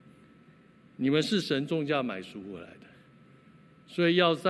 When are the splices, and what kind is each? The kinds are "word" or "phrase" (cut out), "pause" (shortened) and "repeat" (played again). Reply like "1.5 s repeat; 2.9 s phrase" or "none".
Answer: none